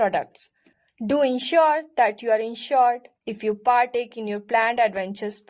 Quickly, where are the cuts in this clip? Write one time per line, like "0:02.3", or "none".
0:03.1